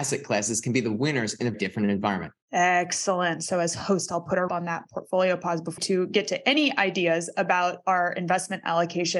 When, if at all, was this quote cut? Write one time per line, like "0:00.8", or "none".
0:01.5
0:02.4
0:04.5
0:05.8